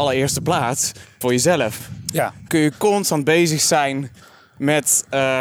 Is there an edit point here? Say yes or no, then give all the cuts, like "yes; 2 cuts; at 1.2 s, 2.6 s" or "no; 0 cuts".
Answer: yes; 2 cuts; at 1.2 s, 2.5 s